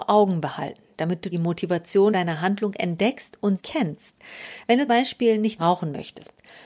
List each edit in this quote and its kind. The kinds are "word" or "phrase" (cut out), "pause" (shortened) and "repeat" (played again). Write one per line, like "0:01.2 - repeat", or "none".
0:01.3 - word
0:02.1 - word
0:03.6 - word
0:04.9 - word
0:05.6 - word